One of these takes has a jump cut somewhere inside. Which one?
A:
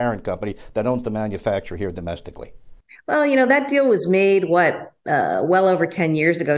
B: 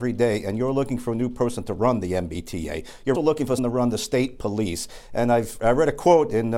B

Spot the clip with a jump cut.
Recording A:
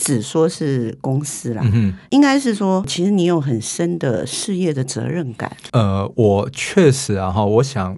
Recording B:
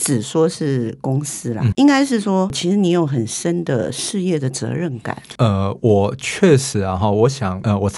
B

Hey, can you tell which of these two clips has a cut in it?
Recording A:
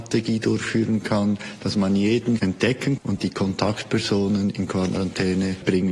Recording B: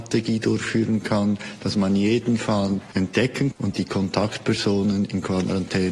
A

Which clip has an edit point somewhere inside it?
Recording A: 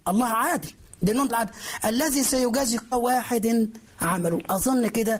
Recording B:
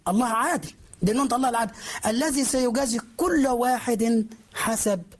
A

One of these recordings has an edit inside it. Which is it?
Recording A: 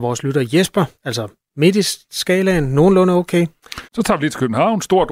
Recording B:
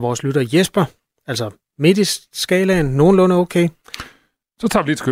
A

